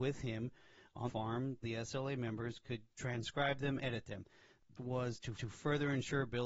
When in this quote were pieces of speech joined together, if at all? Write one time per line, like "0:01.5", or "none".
0:01.1
0:01.6
0:02.9
0:03.8
0:04.8
0:05.3